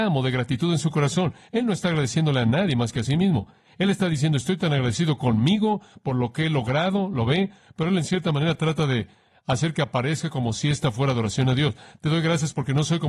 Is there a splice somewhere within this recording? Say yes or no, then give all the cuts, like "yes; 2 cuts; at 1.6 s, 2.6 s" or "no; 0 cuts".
no; 0 cuts